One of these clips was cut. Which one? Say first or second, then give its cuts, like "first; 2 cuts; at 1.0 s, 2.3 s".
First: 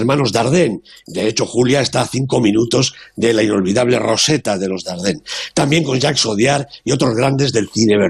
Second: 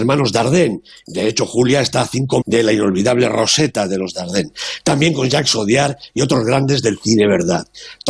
second; 1 cut; at 2.4 s